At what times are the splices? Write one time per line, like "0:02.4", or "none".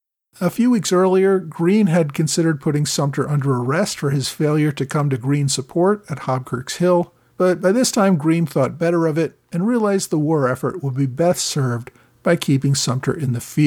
0:07.3